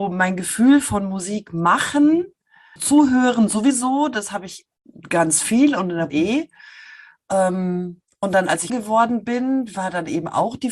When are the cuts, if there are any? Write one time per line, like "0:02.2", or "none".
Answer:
0:02.8
0:06.1
0:08.7